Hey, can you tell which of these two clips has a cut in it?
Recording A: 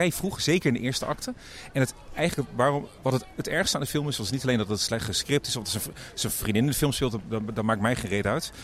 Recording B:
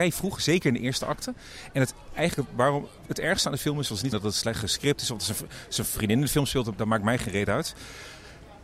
B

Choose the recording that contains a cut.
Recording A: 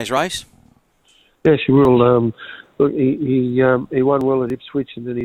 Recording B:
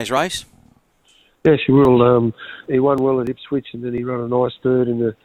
B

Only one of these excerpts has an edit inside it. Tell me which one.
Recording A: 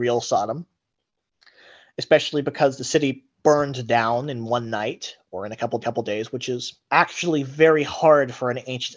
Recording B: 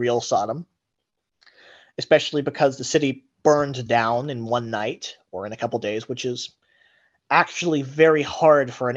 A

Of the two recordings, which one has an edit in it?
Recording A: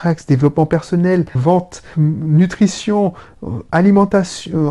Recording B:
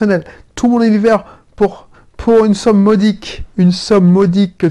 A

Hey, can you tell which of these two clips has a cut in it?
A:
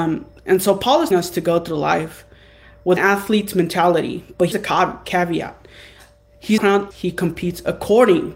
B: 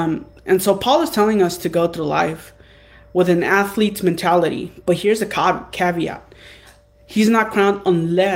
A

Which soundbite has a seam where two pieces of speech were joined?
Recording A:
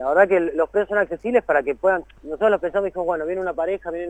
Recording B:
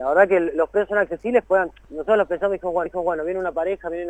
B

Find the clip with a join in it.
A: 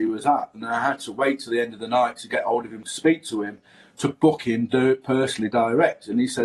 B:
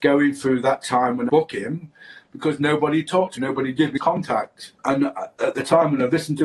B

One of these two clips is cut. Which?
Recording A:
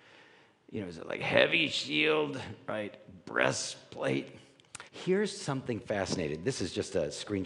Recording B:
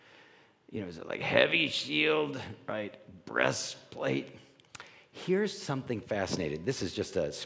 A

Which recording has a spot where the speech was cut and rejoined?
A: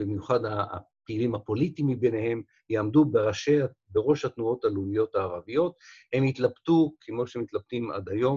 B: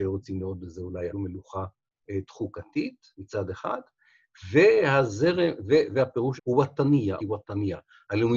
B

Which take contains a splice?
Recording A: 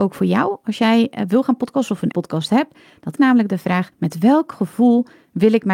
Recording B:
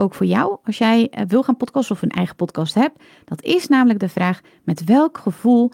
A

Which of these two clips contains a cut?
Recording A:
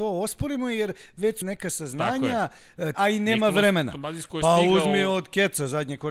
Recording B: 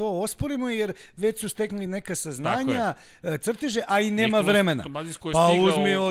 A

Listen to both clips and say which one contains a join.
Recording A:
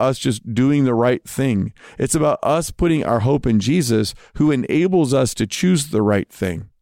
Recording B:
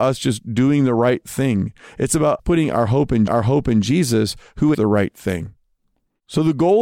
B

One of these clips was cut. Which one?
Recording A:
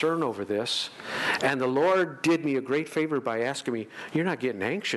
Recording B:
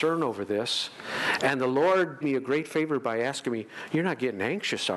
B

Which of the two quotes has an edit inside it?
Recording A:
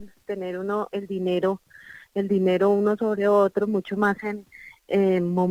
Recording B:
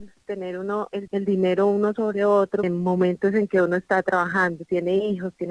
B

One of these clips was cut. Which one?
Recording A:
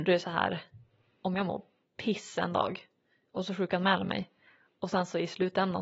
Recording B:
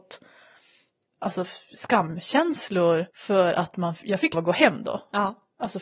B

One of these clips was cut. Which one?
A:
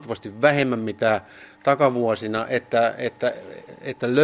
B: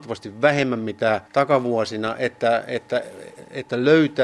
B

